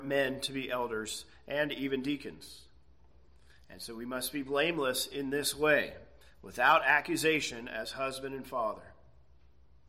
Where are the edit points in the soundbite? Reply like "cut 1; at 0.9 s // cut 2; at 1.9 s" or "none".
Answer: none